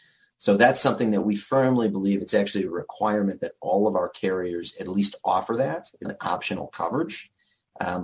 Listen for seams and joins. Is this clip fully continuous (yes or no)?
no